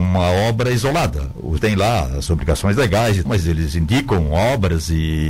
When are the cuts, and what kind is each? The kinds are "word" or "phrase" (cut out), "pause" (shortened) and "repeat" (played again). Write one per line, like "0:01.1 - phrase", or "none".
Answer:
0:01.6 - word
0:02.3 - word
0:03.3 - word